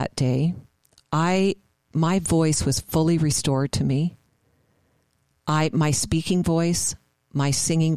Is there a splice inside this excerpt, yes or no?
no